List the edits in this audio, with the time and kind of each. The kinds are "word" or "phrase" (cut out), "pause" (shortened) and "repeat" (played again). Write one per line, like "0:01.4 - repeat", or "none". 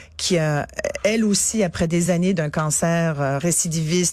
none